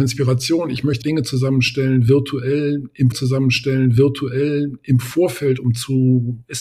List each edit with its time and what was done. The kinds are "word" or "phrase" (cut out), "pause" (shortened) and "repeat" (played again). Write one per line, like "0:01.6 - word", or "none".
0:01.0 - word
0:03.1 - repeat